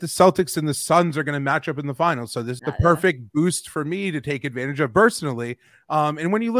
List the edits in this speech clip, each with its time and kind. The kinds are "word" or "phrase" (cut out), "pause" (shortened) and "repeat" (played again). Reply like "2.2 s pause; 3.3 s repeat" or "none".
2.6 s phrase